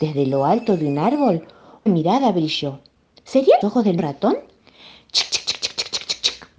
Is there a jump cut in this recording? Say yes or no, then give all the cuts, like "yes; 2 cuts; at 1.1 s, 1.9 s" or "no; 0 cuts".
yes; 4 cuts; at 1.9 s, 3.6 s, 4.0 s, 5.3 s